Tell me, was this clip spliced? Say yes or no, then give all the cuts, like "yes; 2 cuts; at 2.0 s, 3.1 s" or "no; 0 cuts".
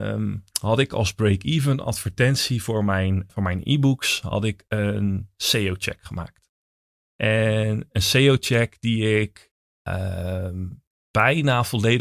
yes; 2 cuts; at 3.3 s, 9.6 s